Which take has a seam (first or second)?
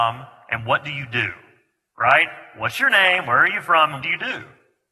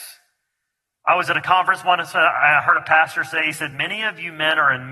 first